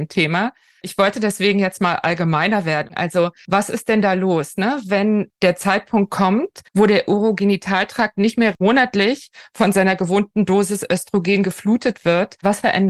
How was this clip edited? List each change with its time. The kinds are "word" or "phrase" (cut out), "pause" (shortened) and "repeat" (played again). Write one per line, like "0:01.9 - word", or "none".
0:06.7 - pause